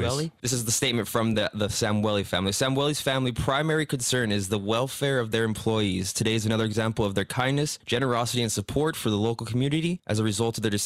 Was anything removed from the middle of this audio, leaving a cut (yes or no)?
no